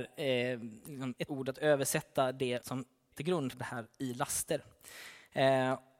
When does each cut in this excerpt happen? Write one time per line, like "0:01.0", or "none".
0:01.3
0:02.6
0:03.1
0:03.5